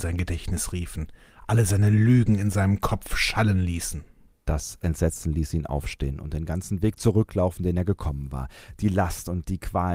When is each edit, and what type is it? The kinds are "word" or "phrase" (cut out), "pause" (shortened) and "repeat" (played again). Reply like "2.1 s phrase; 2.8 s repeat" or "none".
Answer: 4.3 s pause